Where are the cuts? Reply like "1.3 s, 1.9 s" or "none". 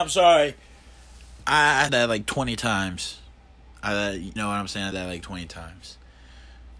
1.9 s, 4.4 s, 4.9 s

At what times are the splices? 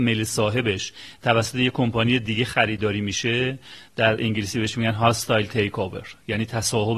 none

